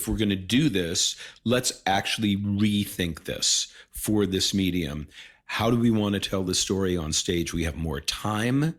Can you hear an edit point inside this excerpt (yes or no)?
no